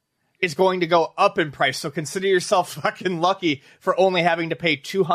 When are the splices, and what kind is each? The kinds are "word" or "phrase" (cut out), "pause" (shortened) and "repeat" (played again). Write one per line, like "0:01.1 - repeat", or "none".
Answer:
none